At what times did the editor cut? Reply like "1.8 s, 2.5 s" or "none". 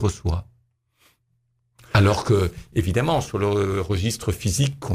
none